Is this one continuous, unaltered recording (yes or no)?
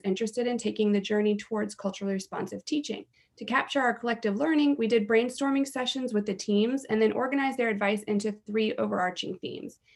no